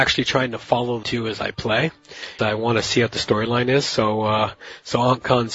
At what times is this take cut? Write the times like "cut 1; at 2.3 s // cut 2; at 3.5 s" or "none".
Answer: cut 1; at 1.0 s // cut 2; at 2.4 s